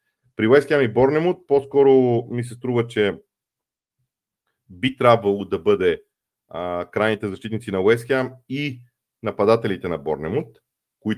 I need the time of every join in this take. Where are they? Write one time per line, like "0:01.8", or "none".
none